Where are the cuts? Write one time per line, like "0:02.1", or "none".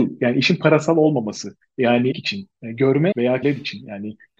0:02.1
0:03.1
0:03.4